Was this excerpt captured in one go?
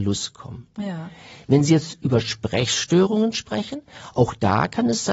yes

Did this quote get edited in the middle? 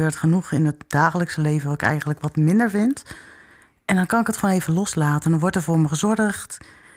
no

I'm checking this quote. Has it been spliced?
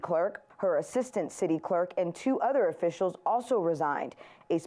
no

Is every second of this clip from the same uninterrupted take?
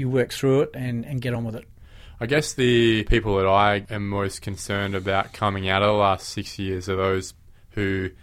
yes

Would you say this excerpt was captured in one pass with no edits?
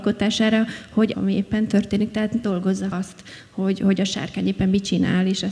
no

